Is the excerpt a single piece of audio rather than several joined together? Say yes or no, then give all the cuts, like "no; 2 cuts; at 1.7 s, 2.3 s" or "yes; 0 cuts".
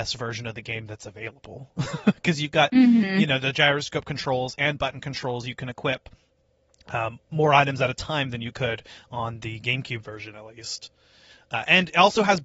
yes; 0 cuts